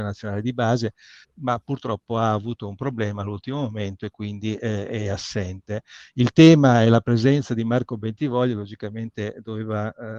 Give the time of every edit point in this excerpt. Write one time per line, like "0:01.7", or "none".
0:01.2